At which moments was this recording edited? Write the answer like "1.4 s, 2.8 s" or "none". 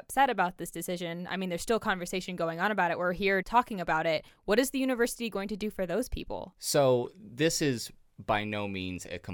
3.4 s